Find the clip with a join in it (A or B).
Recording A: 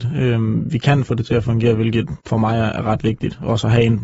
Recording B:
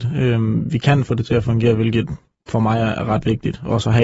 A